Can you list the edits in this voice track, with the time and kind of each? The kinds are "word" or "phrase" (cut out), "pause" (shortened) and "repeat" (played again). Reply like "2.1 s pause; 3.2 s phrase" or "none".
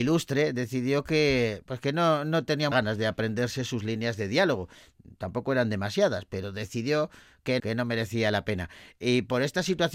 1.6 s word; 2.7 s word; 7.6 s word